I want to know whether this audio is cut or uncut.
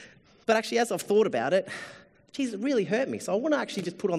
uncut